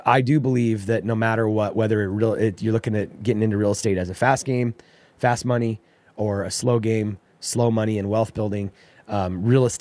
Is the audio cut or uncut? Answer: uncut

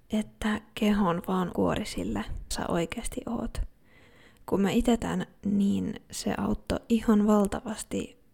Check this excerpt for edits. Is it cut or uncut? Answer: cut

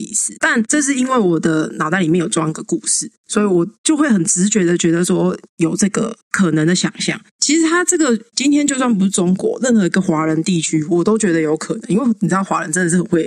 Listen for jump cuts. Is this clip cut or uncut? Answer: cut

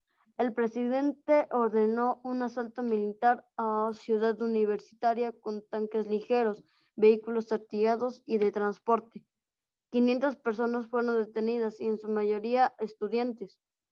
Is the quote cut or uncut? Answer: uncut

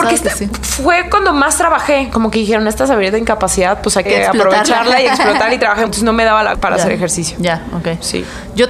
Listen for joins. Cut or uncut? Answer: cut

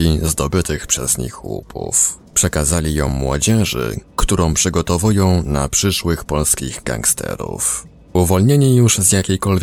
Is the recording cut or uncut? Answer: uncut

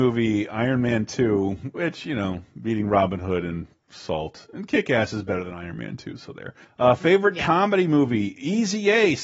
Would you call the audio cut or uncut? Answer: uncut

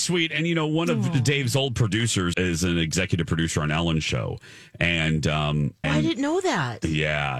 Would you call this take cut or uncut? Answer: cut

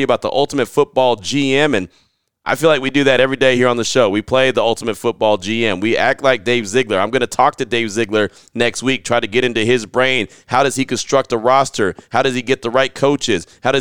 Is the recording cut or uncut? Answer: uncut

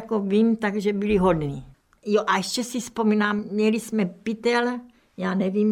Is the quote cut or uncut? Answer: uncut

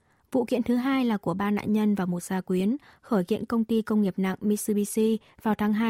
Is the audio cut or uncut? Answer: uncut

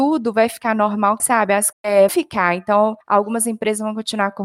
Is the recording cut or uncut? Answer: cut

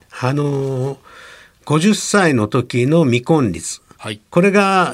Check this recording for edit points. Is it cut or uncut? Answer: uncut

